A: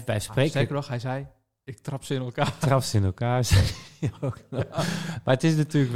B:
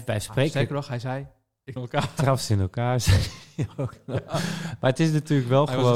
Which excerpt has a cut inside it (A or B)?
B